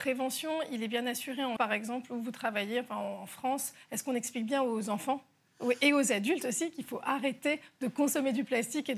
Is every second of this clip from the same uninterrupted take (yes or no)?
no